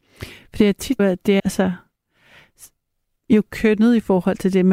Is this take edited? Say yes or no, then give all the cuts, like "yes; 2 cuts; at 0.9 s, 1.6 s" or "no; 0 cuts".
yes; 2 cuts; at 1.0 s, 1.4 s